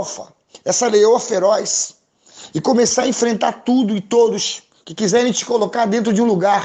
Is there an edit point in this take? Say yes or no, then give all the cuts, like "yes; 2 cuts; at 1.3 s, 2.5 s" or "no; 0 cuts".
no; 0 cuts